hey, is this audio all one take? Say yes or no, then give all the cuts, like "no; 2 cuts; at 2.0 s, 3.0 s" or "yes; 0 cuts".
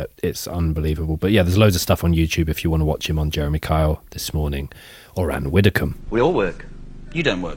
yes; 0 cuts